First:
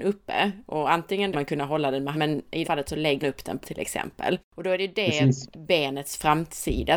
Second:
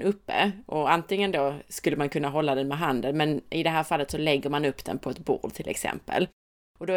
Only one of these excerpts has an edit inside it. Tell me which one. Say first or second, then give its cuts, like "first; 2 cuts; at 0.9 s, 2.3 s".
first; 6 cuts; at 1.3 s, 2.1 s, 2.6 s, 3.2 s, 3.6 s, 4.4 s